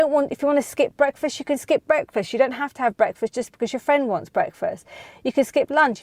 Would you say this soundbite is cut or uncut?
uncut